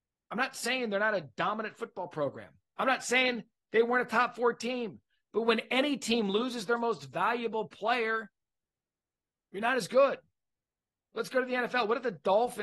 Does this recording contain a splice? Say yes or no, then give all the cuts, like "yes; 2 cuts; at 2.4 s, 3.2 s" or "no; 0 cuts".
no; 0 cuts